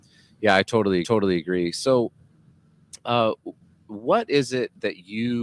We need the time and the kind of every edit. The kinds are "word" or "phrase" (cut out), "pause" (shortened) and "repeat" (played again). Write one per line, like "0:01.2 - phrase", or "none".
0:01.0 - repeat